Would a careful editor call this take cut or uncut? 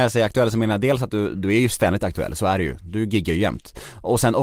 uncut